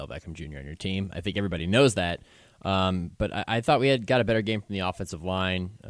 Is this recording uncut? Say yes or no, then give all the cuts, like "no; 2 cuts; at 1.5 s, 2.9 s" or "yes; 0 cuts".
yes; 0 cuts